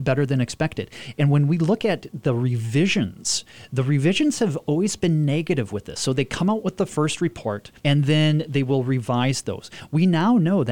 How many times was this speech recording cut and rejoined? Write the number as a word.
one